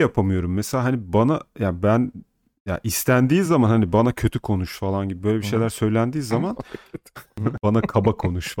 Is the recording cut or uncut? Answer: uncut